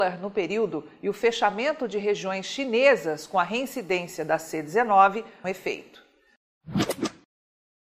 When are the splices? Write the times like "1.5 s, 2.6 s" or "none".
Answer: 5.4 s